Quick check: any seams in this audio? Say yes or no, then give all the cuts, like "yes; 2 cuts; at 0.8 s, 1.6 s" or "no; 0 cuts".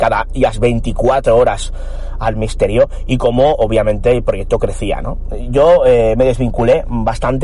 no; 0 cuts